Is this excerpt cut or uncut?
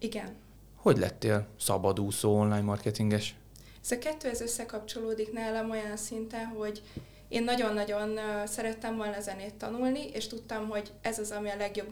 uncut